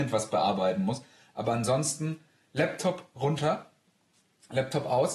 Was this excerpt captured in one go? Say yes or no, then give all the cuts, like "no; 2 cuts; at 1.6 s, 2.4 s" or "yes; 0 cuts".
yes; 0 cuts